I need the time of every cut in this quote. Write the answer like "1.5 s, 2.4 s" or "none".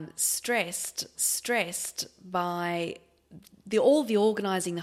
1.1 s